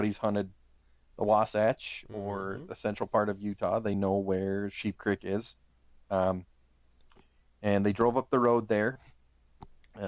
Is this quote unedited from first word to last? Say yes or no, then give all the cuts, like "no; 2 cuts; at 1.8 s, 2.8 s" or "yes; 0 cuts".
yes; 0 cuts